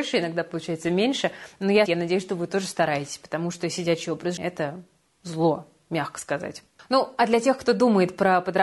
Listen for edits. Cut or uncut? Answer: cut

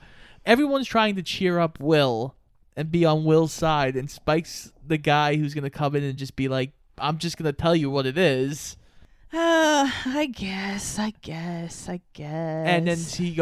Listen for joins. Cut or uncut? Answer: uncut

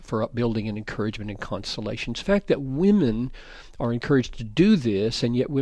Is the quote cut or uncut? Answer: cut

